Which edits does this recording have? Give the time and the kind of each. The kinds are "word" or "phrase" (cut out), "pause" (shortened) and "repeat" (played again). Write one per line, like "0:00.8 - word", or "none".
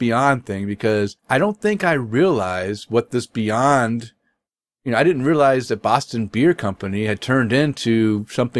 0:01.2 - pause